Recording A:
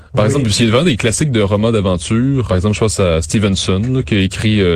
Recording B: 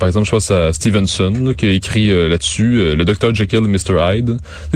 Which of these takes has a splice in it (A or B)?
A